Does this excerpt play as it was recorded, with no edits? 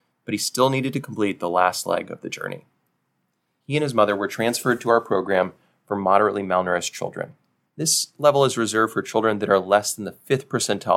yes; 0 cuts

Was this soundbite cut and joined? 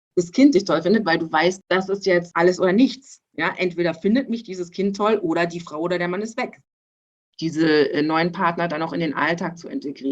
no; 0 cuts

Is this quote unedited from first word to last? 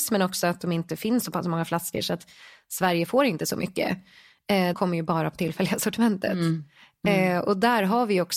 no; 1 cut; at 4.7 s

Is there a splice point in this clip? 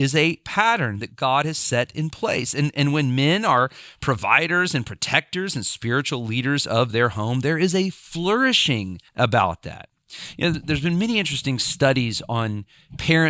yes; 2 cuts; at 9.1 s, 10.5 s

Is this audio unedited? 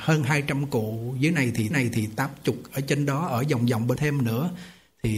no; 2 cuts; at 1.7 s, 4.0 s

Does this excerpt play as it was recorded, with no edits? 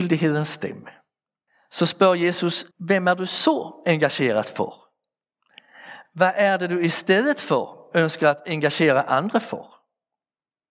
no; 2 cuts; at 1.5 s, 2.7 s

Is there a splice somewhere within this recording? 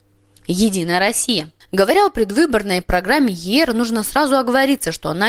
no; 0 cuts

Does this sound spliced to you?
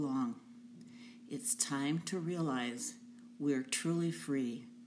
no; 0 cuts

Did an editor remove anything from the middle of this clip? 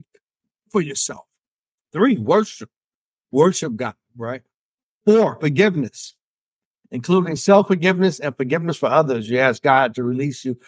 no; 0 cuts

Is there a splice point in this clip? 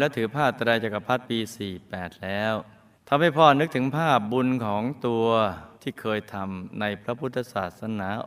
yes; 2 cuts; at 2.9 s, 5.8 s

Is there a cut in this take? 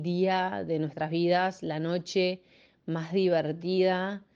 no; 0 cuts

